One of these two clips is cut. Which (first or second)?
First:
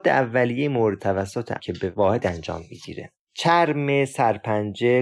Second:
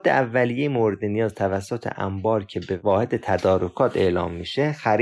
first